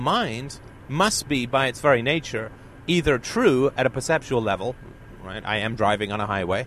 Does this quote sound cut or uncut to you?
uncut